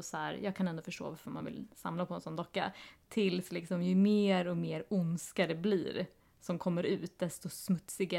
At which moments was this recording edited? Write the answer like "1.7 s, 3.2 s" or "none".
none

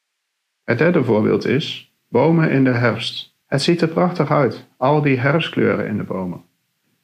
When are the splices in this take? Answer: 2.0 s, 3.4 s

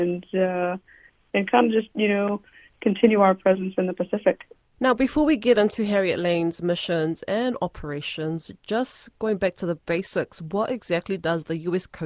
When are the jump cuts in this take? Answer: none

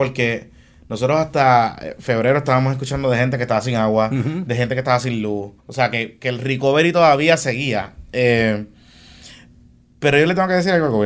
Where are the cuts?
5.6 s

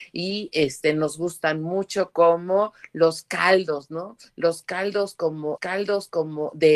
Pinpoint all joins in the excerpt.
5.6 s

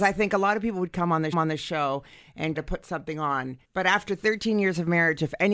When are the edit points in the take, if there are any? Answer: 1.3 s, 2.6 s, 3.6 s

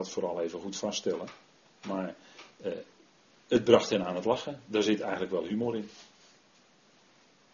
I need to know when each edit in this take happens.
none

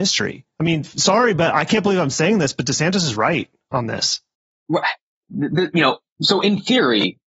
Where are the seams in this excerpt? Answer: 4.3 s

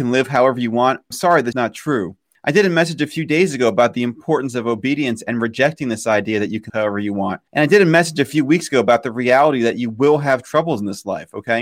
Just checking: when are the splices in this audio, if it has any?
1.1 s, 1.5 s, 2.3 s, 6.7 s, 7.5 s

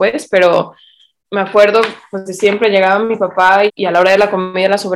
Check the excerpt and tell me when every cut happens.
1.2 s, 2.3 s, 3.7 s

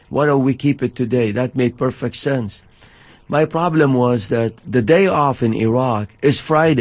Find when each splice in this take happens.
none

